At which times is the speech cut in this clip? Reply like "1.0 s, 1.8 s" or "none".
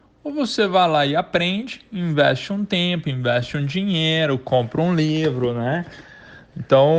none